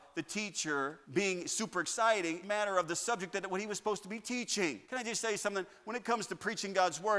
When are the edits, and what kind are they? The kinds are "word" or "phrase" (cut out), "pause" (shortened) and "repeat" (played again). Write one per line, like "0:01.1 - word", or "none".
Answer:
0:01.0 - pause
0:02.4 - phrase
0:04.8 - pause